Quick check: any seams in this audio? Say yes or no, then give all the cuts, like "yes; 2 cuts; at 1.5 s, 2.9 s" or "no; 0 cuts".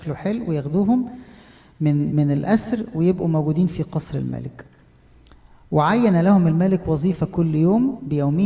no; 0 cuts